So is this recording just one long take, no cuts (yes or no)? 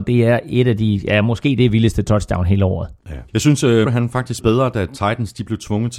no